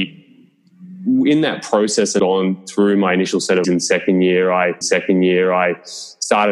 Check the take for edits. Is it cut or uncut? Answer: cut